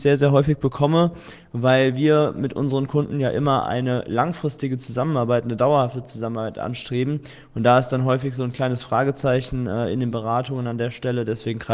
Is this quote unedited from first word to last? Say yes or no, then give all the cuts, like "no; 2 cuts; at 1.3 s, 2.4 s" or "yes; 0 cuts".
yes; 0 cuts